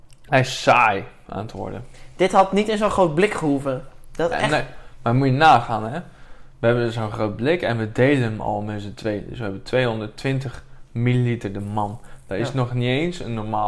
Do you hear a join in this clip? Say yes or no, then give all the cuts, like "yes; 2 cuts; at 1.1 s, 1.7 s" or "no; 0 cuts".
no; 0 cuts